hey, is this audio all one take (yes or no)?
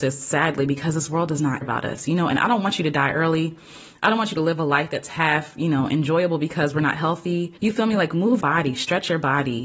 no